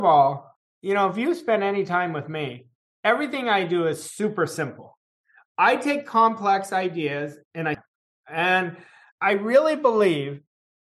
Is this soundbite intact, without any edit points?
no; 1 cut; at 7.7 s

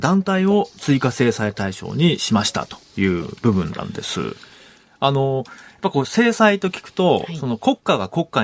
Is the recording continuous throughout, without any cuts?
yes; 0 cuts

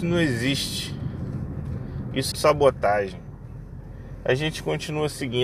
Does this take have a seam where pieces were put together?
yes; 1 cut; at 2.3 s

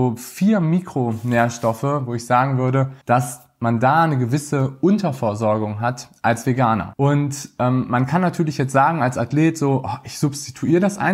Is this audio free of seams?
no; 1 cut; at 3.0 s

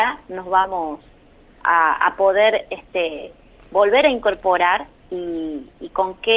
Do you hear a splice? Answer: no; 0 cuts

